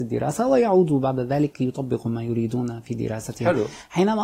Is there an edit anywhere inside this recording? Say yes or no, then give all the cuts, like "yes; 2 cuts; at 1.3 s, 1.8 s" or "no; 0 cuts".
no; 0 cuts